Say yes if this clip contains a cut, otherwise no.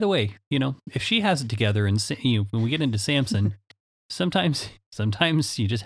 no